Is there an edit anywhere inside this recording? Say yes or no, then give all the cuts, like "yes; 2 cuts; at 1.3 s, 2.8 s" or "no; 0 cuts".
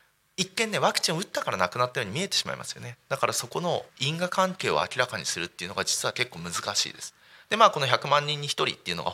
yes; 1 cut; at 3.9 s